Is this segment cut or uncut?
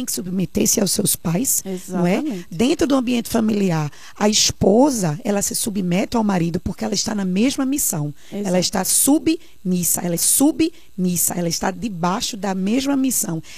cut